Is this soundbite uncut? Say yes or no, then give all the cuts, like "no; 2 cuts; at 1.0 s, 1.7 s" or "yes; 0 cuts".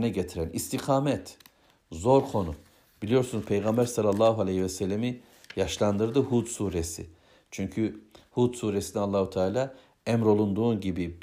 yes; 0 cuts